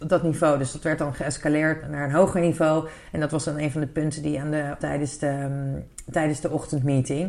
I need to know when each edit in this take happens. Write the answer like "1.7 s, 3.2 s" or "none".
1.8 s, 4.8 s

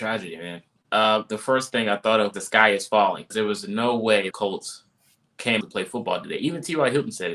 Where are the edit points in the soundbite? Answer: 2.3 s, 3.3 s, 4.3 s, 5.6 s

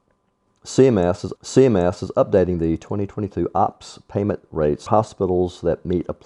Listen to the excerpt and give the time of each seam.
1.4 s, 4.9 s

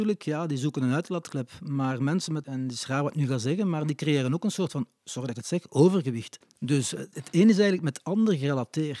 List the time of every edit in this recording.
2.4 s, 7.1 s

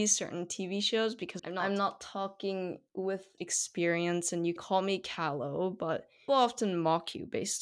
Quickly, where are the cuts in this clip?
1.4 s, 3.4 s, 4.6 s, 6.3 s

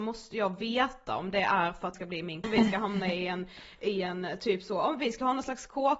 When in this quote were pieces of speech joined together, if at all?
1.9 s, 2.4 s

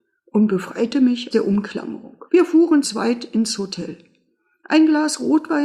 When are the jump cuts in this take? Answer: 1.3 s, 2.3 s, 2.8 s

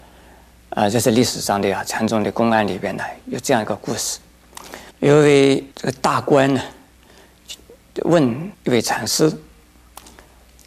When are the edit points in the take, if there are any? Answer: 4.9 s, 5.7 s, 8.5 s

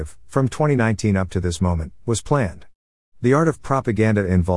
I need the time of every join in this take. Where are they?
none

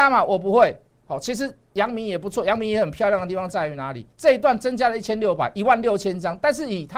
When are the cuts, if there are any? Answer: 1.0 s, 4.1 s

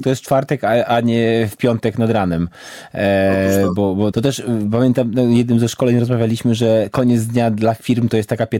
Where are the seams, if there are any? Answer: 4.1 s

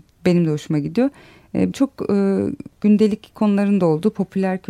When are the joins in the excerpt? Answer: 1.7 s, 2.7 s

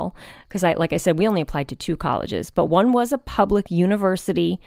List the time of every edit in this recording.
none

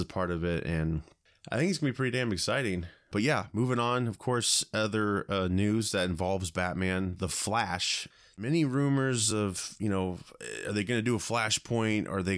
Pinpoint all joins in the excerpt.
none

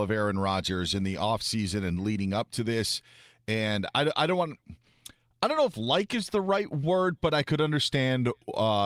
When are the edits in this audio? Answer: none

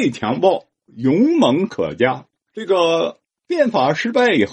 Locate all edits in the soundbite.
2.3 s

